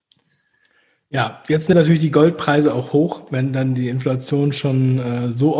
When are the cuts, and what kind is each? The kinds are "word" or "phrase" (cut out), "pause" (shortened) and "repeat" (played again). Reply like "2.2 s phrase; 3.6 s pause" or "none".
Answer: 1.7 s phrase